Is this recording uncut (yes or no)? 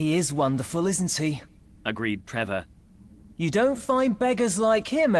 yes